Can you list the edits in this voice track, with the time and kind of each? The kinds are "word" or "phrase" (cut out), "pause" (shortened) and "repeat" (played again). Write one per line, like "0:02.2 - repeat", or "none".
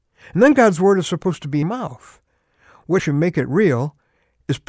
0:01.6 - phrase
0:03.0 - word

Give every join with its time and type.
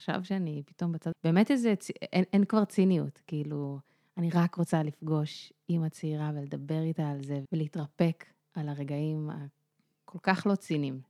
0:01.1 - word
0:07.5 - word

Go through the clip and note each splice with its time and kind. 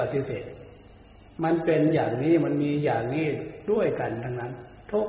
none

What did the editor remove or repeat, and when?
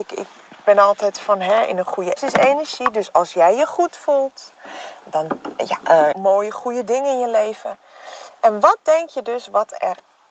0:02.2 - phrase
0:06.1 - phrase

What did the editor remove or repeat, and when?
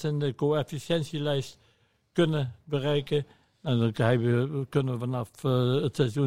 none

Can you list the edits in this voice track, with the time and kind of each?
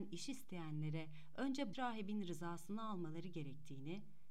0:01.7 - word

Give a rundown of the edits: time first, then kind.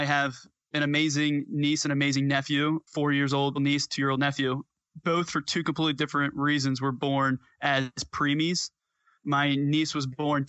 0:02.9 - pause
0:03.6 - phrase

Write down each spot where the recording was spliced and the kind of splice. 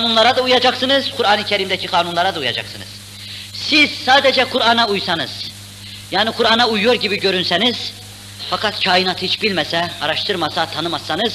none

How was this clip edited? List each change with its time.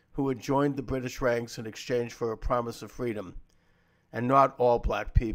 none

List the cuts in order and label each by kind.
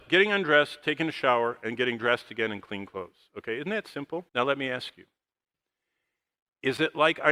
0:04.3 - pause

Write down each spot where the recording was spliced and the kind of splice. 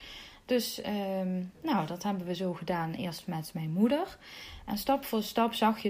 none

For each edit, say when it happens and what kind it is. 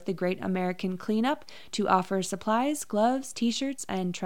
none

